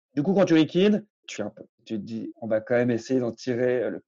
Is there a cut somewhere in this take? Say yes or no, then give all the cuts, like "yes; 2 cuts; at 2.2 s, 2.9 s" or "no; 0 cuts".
yes; 2 cuts; at 1.4 s, 2.3 s